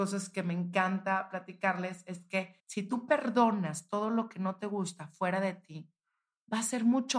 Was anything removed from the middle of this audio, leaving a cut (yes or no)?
yes